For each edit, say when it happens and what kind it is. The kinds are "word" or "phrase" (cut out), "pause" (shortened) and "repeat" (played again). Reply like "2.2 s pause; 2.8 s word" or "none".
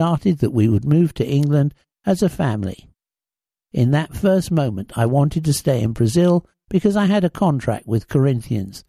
none